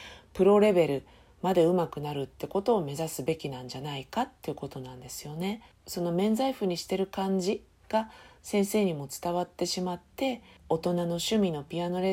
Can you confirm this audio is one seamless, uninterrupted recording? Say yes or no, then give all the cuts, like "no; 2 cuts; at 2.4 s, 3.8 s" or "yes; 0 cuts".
yes; 0 cuts